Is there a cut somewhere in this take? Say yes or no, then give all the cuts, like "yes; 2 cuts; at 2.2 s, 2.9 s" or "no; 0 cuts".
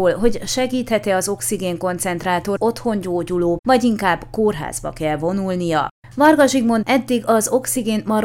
yes; 3 cuts; at 2.6 s, 3.6 s, 6.8 s